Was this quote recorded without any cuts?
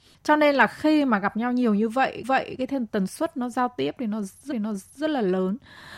no; 2 cuts; at 2.2 s, 4.5 s

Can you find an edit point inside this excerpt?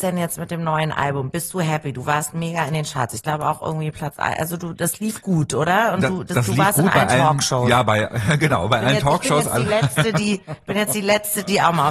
no; 0 cuts

